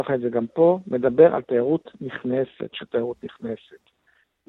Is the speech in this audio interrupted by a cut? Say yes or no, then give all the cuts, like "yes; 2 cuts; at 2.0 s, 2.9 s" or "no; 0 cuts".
yes; 1 cut; at 2.7 s